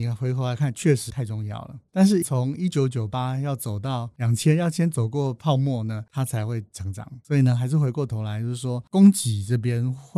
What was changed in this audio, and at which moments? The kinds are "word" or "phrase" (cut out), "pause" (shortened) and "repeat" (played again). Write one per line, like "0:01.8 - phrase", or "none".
0:01.1 - word
0:02.2 - word